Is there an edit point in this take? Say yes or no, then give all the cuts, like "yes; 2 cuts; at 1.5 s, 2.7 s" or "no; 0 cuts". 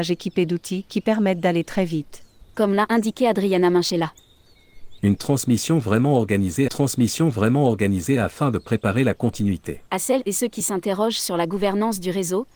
yes; 2 cuts; at 6.7 s, 9.9 s